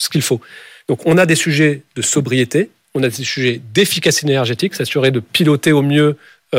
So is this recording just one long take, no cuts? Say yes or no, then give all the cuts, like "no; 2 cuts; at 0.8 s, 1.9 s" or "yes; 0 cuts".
yes; 0 cuts